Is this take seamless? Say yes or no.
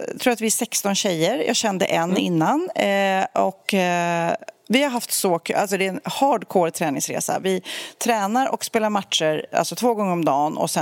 yes